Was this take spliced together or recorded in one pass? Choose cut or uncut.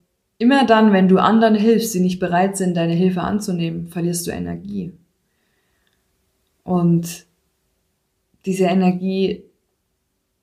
uncut